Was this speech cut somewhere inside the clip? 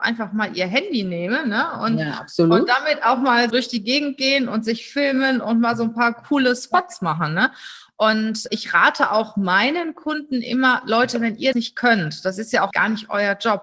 yes; 4 cuts; at 3.5 s, 8.5 s, 11.5 s, 12.7 s

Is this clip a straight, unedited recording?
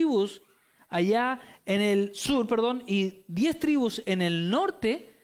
yes; 0 cuts

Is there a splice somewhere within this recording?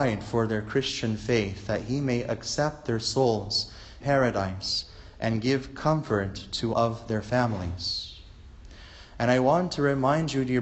yes; 2 cuts; at 4.0 s, 6.7 s

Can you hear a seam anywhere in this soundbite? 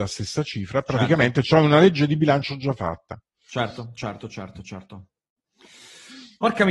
no; 0 cuts

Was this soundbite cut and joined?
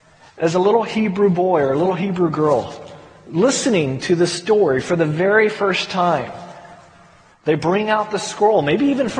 no; 0 cuts

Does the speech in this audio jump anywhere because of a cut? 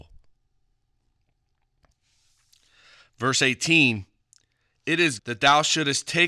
yes; 1 cut; at 5.2 s

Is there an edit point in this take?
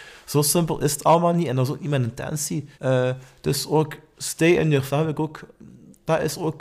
yes; 2 cuts; at 2.7 s, 4.9 s

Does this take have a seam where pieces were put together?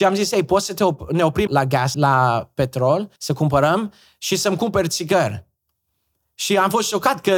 yes; 3 cuts; at 1.5 s, 1.9 s, 3.2 s

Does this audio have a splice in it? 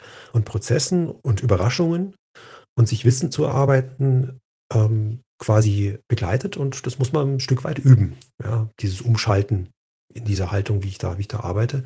no; 0 cuts

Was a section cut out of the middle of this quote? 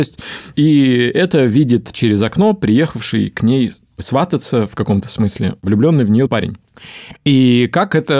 yes; 1 cut; at 6.3 s

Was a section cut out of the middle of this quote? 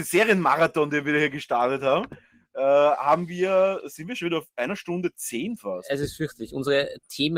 no; 0 cuts

